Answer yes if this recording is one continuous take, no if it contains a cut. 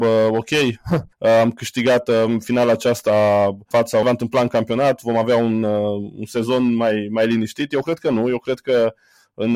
no